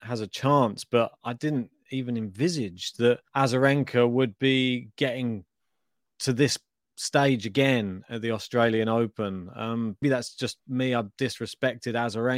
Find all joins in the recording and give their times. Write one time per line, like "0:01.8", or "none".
0:03.3
0:10.0
0:10.6